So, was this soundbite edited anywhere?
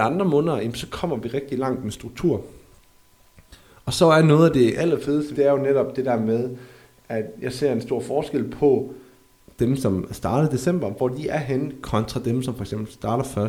yes; 1 cut; at 5.3 s

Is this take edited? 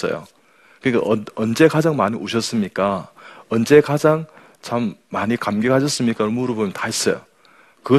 no; 0 cuts

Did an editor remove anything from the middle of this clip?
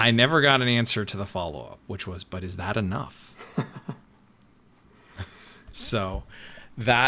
yes; 1 cut; at 4.0 s

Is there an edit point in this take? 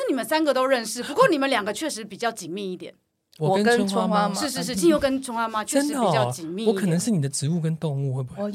no; 0 cuts

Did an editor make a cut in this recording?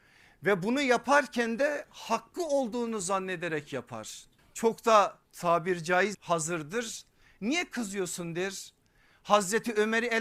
yes; 3 cuts; at 4.4 s, 5.2 s, 6.1 s

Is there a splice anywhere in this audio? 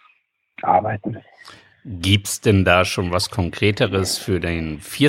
no; 0 cuts

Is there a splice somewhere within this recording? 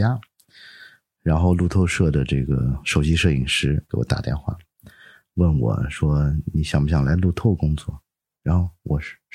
yes; 1 cut; at 3.9 s

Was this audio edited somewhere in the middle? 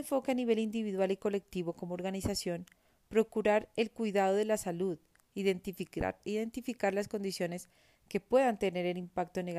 no; 0 cuts

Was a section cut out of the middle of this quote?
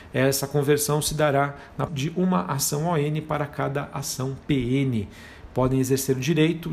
yes; 1 cut; at 1.9 s

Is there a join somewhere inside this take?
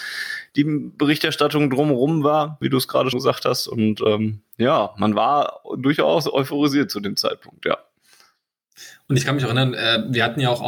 yes; 2 cuts; at 2.6 s, 3.1 s

